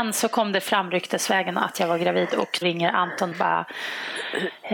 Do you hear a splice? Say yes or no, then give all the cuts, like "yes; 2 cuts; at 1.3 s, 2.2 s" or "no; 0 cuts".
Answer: yes; 2 cuts; at 2.6 s, 3.3 s